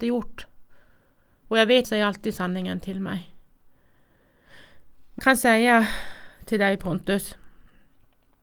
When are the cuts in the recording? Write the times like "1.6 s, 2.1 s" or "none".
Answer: 1.8 s, 5.2 s